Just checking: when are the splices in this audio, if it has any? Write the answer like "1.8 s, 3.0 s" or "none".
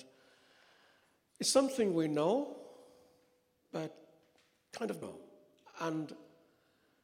5.0 s